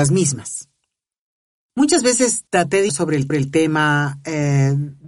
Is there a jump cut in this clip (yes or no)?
yes